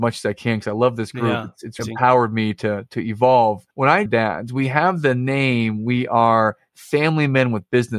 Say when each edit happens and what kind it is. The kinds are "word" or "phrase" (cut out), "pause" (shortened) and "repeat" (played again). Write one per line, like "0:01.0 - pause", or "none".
0:01.8 - word
0:03.7 - pause
0:04.1 - phrase